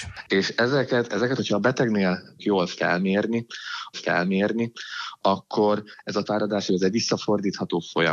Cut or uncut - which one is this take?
cut